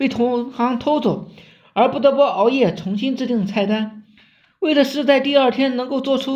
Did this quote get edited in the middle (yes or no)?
no